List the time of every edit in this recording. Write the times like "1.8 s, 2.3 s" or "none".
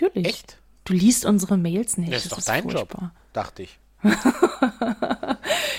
none